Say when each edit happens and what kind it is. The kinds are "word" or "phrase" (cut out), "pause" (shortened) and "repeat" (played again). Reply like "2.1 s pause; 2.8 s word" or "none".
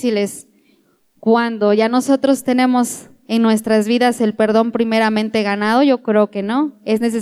none